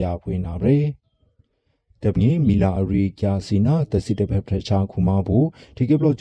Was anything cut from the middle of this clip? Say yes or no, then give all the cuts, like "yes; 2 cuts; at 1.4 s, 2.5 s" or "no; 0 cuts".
yes; 1 cut; at 2.2 s